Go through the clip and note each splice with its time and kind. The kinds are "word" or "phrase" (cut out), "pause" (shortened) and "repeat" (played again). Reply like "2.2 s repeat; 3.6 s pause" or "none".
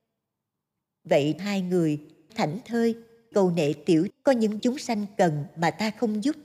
1.4 s word; 2.3 s word; 3.3 s word; 4.1 s word; 4.6 s word